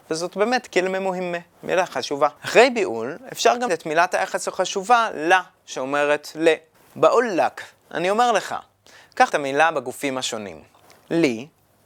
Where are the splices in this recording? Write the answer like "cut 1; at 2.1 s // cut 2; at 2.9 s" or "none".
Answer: cut 1; at 2.4 s // cut 2; at 3.7 s // cut 3; at 6.7 s // cut 4; at 9.3 s